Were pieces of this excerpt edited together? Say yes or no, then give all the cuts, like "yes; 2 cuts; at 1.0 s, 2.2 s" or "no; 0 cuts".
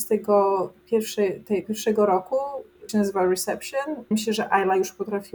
yes; 3 cuts; at 1.6 s, 2.9 s, 4.1 s